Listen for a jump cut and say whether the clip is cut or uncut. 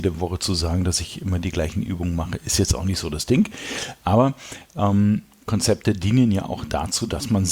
uncut